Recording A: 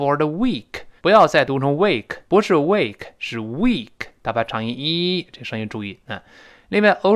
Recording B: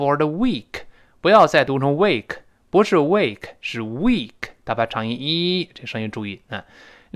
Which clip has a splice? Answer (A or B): A